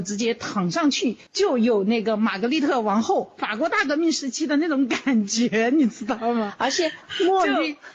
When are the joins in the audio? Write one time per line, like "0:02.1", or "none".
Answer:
0:01.3